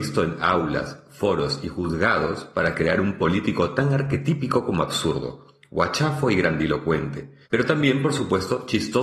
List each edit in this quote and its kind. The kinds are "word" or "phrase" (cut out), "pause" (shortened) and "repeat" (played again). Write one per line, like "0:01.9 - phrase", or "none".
0:07.4 - pause